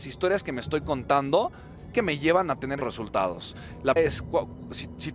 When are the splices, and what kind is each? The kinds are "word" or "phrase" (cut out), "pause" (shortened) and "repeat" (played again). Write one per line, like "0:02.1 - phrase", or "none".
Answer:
0:01.9 - word
0:02.8 - word
0:04.0 - word